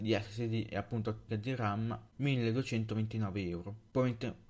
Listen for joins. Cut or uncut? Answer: cut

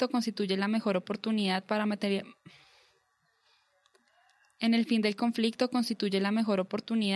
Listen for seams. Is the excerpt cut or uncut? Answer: uncut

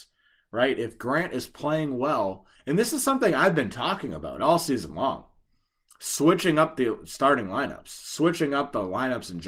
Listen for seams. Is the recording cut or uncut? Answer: uncut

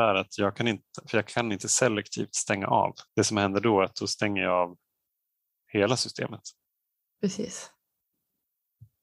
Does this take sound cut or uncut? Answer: cut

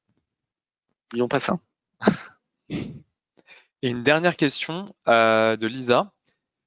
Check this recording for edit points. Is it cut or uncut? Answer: uncut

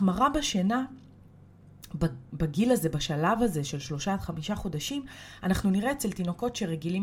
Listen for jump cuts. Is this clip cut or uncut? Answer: uncut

